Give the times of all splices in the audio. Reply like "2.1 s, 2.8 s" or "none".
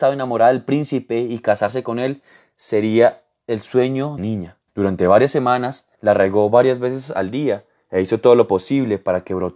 4.2 s, 4.7 s, 5.9 s